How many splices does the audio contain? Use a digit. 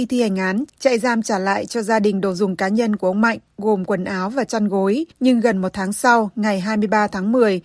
1